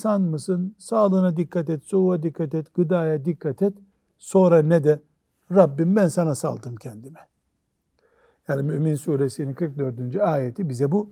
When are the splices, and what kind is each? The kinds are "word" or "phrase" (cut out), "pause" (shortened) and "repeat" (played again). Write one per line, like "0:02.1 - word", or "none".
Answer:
none

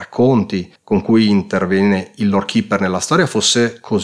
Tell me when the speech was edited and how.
none

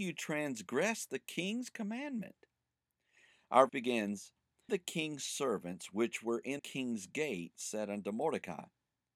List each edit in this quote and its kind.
0:03.7 - word
0:04.7 - word
0:06.6 - word

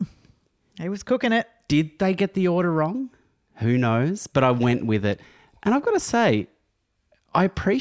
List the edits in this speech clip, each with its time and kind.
none

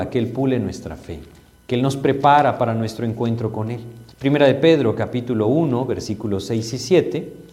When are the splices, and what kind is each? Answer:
0:04.1 - pause

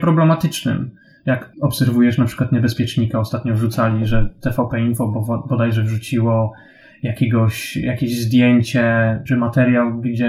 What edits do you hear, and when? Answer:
none

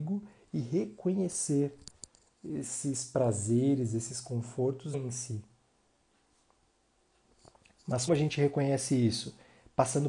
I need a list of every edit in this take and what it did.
0:04.9 - word
0:08.1 - word

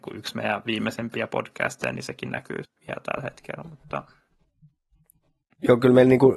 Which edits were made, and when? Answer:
0:02.6 - word

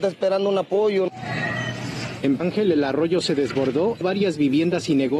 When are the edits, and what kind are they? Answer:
0:02.4 - word
0:04.0 - word

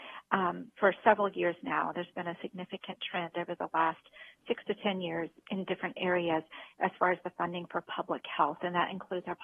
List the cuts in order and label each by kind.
none

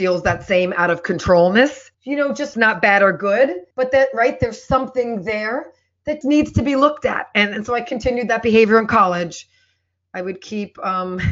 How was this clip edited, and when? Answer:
0:01.9 - pause
0:02.5 - phrase
0:03.7 - pause
0:06.2 - word

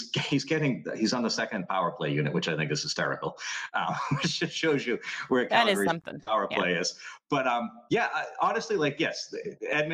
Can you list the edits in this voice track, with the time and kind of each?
none

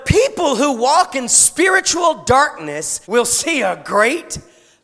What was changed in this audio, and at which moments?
0:03.0 - pause

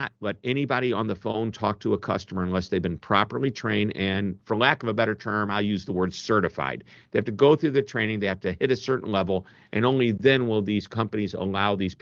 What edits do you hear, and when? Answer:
none

